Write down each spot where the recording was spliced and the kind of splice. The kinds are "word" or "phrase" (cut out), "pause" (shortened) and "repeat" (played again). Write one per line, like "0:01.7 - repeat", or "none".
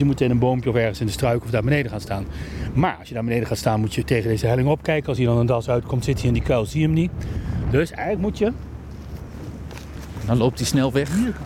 none